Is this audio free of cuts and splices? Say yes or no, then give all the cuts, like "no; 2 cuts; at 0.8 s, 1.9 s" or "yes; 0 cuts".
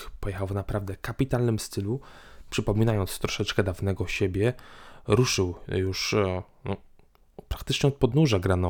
yes; 0 cuts